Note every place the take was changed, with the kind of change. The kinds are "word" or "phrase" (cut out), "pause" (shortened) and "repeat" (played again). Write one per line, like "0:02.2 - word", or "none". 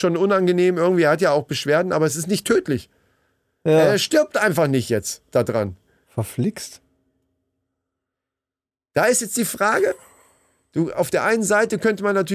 none